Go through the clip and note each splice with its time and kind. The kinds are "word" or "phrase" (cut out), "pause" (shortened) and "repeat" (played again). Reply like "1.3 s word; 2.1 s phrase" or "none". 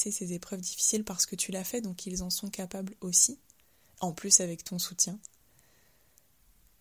none